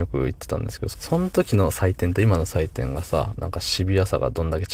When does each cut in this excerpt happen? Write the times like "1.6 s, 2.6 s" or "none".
0.9 s, 3.4 s

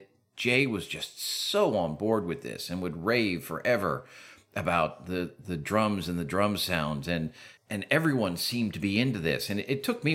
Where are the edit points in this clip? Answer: 7.6 s

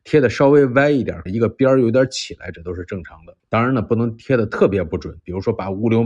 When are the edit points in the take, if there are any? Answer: 1.3 s, 3.4 s

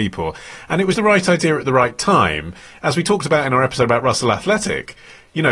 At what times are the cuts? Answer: 0.9 s

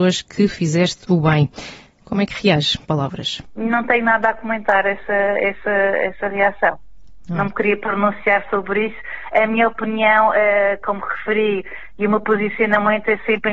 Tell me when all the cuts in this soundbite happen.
2.8 s

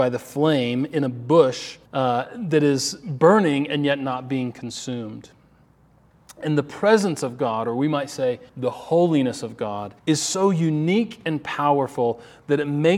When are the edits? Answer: 1.9 s, 8.5 s, 10.0 s

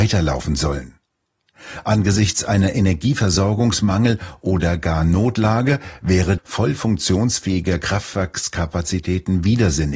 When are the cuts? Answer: 6.4 s

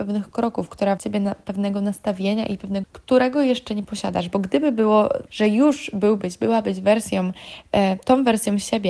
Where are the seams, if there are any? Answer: 1.0 s, 2.8 s, 5.3 s

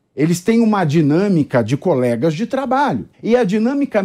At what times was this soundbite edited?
3.1 s

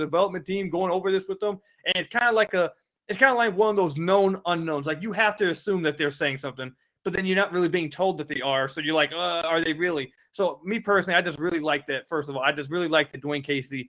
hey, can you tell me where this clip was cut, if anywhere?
none

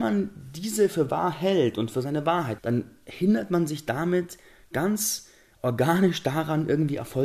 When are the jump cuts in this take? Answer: 2.6 s

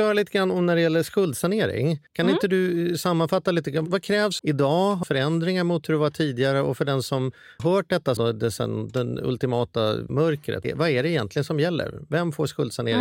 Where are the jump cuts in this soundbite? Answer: 2.1 s, 4.4 s, 5.0 s, 7.6 s, 8.2 s, 10.1 s, 10.6 s

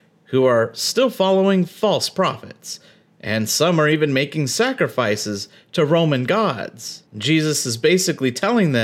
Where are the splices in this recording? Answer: none

